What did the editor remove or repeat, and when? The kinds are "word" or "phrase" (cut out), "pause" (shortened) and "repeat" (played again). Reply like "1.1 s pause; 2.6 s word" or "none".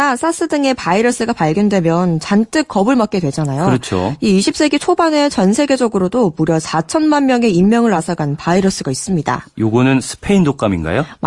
none